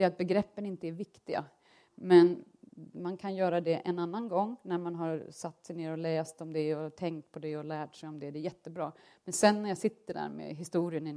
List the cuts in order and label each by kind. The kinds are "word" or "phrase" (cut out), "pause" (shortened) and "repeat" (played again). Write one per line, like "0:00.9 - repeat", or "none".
none